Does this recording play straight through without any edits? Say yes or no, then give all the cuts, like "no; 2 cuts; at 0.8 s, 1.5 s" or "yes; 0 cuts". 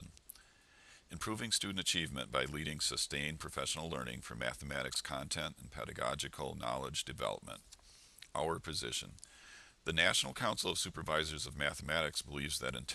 yes; 0 cuts